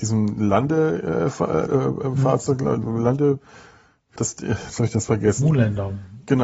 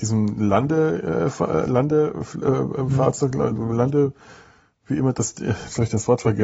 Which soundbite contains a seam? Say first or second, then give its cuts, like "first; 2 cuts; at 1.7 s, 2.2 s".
first; 3 cuts; at 1.7 s, 4.2 s, 5.1 s